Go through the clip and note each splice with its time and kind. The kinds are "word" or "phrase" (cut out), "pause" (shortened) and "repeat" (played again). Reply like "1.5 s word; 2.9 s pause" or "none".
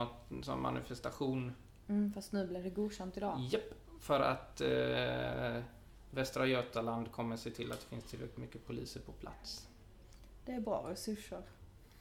none